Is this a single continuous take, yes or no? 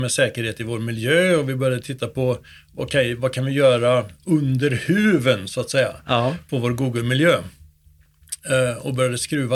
yes